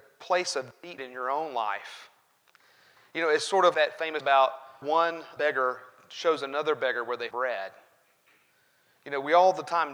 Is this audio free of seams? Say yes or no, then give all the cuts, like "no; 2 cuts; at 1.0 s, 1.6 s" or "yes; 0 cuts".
no; 6 cuts; at 1.0 s, 3.7 s, 4.2 s, 4.8 s, 5.4 s, 7.3 s